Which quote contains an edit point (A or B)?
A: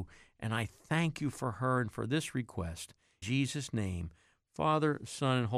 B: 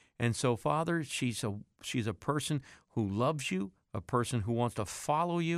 A